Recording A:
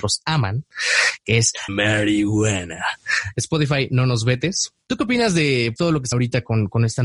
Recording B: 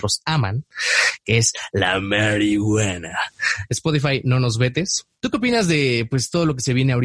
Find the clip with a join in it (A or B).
A